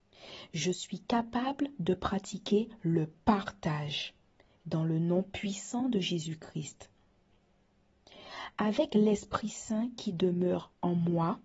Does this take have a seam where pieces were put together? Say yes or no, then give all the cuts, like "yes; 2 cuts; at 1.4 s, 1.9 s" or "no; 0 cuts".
no; 0 cuts